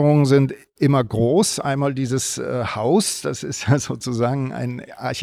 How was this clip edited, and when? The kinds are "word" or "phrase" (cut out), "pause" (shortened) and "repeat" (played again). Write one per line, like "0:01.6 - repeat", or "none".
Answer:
none